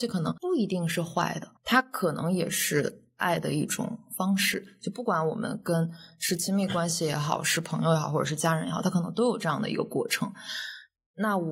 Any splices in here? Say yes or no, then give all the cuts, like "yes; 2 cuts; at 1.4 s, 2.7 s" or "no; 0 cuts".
yes; 1 cut; at 1.6 s